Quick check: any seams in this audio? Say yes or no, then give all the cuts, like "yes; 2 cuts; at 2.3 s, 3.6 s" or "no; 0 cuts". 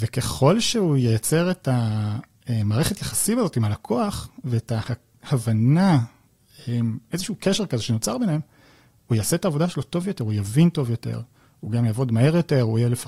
no; 0 cuts